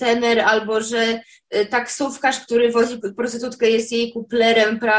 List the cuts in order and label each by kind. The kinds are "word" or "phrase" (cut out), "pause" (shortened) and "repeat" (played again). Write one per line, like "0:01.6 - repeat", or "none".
0:03.0 - word